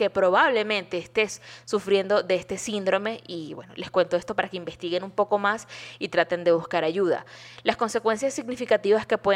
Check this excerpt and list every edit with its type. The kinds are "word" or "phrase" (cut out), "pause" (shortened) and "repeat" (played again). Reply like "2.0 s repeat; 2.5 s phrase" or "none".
none